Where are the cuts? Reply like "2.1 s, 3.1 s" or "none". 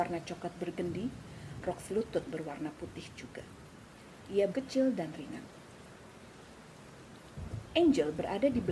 1.6 s, 2.3 s, 4.5 s